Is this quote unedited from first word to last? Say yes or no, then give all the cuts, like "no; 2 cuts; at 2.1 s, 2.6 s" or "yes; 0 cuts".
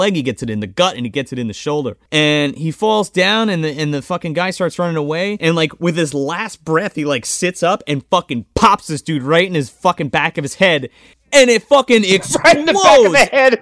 yes; 0 cuts